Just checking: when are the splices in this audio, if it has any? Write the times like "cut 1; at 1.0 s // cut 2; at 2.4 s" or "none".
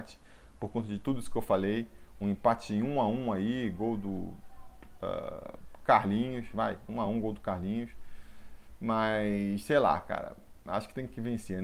none